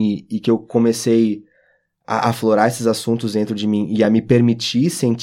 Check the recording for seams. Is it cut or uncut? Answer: uncut